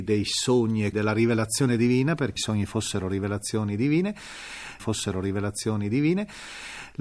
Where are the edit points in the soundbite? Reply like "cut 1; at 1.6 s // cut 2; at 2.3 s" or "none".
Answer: cut 1; at 0.9 s // cut 2; at 2.4 s // cut 3; at 4.8 s